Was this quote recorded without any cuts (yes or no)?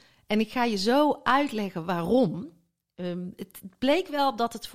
yes